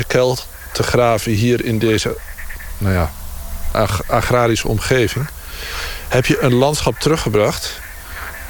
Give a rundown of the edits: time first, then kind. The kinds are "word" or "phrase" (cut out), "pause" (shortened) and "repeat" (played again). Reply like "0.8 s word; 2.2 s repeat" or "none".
3.7 s word